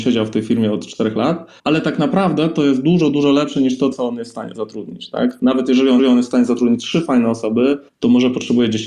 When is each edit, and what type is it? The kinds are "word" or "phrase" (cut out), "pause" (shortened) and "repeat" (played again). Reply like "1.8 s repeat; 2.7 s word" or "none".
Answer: 1.6 s pause; 6.0 s repeat; 7.9 s pause